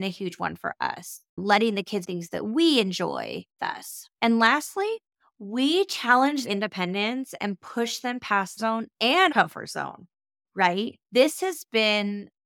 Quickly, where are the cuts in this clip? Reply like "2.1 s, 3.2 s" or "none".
1.3 s, 2.0 s, 3.6 s, 4.1 s, 5.1 s, 6.4 s, 8.6 s, 9.3 s, 11.0 s

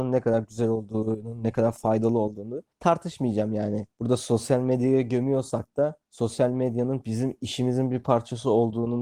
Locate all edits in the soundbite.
2.7 s, 3.9 s, 6.0 s

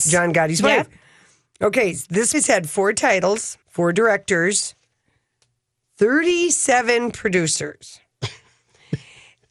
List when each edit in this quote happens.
2.3 s, 3.6 s

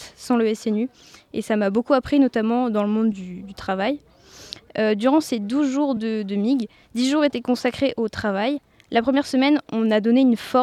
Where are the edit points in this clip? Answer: none

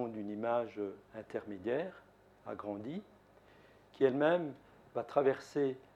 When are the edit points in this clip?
none

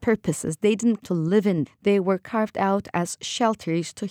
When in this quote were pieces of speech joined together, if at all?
1.0 s, 1.7 s

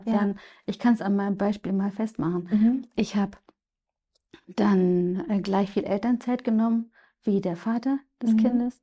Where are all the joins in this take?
none

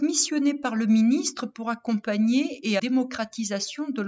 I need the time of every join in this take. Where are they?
2.8 s

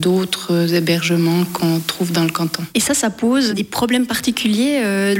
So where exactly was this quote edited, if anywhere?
3.5 s

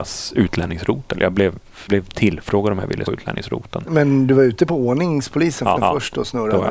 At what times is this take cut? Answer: 1.9 s, 3.1 s, 5.8 s

